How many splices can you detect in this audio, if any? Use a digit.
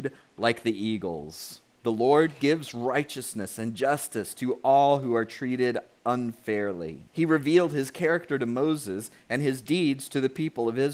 2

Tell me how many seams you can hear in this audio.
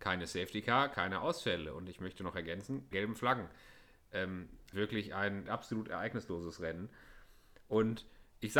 3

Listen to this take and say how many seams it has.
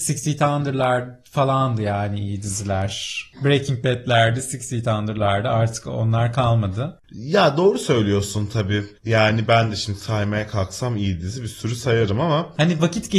1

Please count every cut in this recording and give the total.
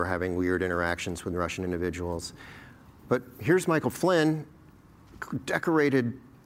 0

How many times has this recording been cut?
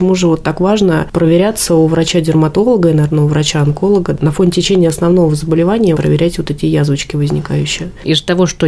1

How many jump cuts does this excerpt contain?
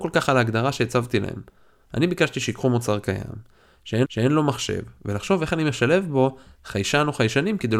1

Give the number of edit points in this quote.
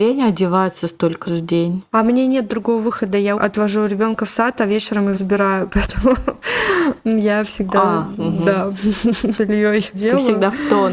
5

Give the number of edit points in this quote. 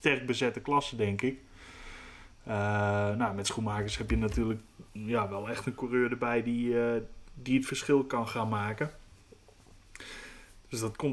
1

